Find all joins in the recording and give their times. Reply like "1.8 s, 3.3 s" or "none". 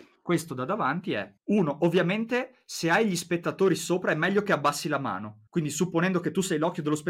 1.4 s, 5.5 s